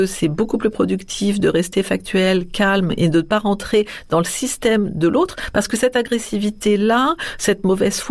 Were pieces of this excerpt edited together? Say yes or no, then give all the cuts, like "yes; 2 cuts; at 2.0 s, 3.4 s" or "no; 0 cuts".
no; 0 cuts